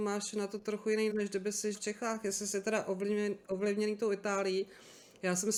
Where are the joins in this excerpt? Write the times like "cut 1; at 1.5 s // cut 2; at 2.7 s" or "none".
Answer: cut 1; at 1.1 s // cut 2; at 1.7 s